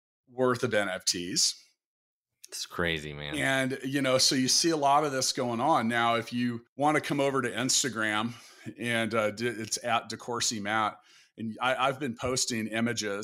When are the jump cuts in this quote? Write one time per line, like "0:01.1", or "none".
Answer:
0:06.7